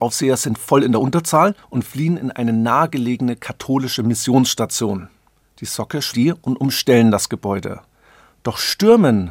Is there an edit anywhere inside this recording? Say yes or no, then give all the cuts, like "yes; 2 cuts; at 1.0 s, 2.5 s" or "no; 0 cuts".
yes; 3 cuts; at 1.6 s, 5.4 s, 6.1 s